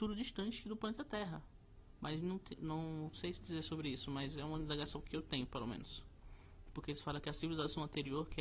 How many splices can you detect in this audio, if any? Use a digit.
0